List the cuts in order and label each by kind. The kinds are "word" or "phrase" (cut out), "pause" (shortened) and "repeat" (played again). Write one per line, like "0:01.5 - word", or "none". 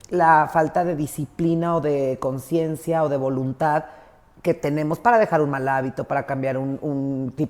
none